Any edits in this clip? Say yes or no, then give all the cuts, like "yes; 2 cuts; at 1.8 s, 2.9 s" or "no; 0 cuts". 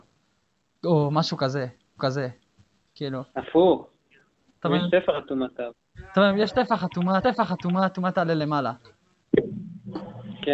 yes; 2 cuts; at 2.0 s, 7.2 s